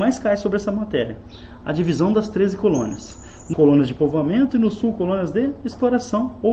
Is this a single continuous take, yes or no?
no